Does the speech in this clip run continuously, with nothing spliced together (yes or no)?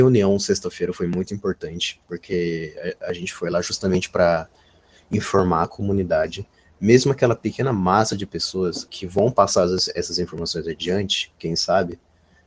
yes